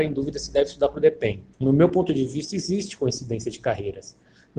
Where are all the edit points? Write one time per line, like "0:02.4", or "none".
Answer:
0:01.5